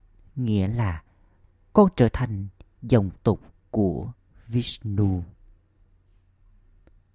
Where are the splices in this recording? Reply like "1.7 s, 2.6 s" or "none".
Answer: none